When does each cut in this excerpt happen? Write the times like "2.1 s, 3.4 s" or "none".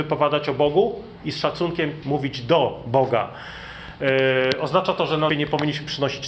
2.0 s, 5.3 s

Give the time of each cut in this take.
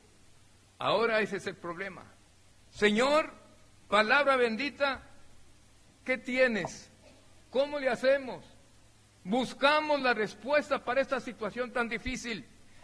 none

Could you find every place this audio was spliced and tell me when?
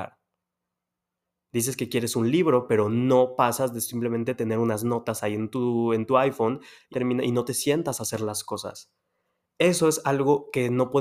6.9 s

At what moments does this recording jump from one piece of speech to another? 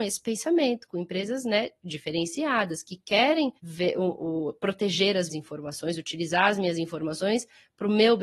3.6 s, 5.3 s

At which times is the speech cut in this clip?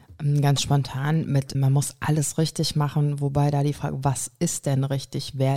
1.5 s

